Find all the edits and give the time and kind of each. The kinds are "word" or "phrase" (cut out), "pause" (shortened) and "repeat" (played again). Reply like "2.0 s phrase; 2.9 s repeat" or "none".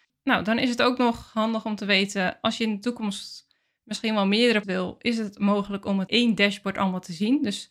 4.6 s word; 6.1 s word